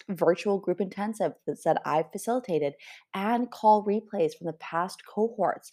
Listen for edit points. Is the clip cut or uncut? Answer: uncut